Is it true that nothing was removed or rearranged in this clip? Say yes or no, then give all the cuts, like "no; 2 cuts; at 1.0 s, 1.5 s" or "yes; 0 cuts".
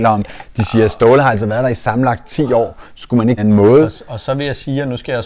no; 1 cut; at 3.4 s